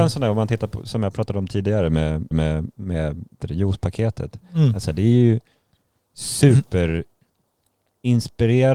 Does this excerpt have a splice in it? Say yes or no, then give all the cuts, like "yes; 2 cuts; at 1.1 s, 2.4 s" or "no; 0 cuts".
yes; 2 cuts; at 2.3 s, 3.4 s